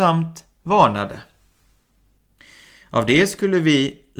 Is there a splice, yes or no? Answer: no